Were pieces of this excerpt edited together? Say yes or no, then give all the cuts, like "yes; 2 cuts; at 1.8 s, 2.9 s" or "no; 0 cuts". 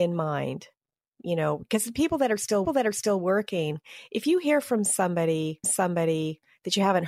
yes; 2 cuts; at 2.6 s, 5.6 s